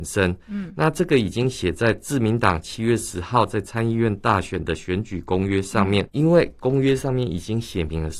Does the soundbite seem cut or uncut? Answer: cut